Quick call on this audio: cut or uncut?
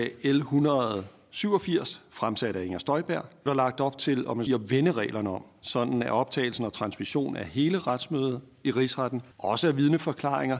cut